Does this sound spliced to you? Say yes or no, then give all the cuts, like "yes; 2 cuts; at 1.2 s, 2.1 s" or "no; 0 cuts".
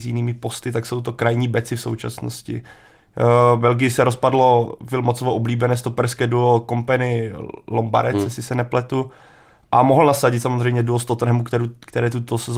no; 0 cuts